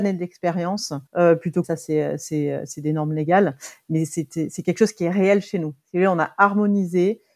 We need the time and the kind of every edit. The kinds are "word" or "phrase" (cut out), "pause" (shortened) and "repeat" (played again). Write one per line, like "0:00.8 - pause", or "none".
0:01.1 - pause
0:01.6 - phrase